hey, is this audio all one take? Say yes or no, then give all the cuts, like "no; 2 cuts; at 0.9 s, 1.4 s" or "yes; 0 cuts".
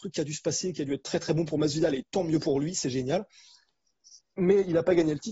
yes; 0 cuts